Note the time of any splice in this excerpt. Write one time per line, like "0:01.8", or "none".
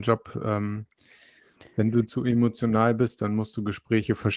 none